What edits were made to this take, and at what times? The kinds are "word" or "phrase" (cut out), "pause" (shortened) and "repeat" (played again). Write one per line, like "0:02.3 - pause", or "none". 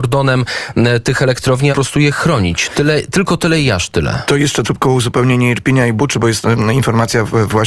0:01.7 - word
0:04.6 - word